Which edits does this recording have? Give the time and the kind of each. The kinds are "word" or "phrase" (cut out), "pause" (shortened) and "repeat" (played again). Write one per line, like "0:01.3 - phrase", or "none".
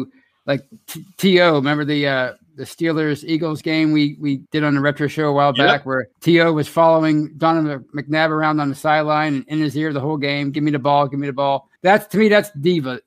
0:04.5 - pause
0:06.1 - pause
0:11.8 - pause